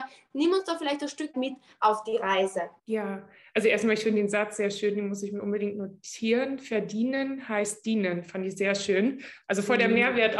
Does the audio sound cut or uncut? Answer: cut